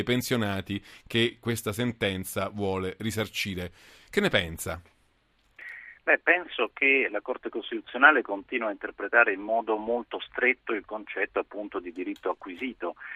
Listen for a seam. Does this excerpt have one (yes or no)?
no